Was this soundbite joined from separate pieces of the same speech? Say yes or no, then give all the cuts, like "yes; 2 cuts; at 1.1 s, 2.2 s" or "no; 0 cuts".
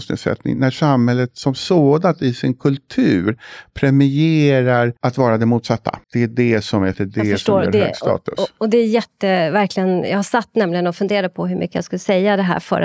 yes; 3 cuts; at 5.0 s, 6.0 s, 6.9 s